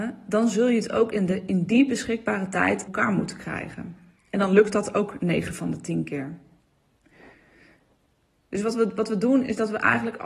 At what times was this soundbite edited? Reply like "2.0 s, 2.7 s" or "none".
2.9 s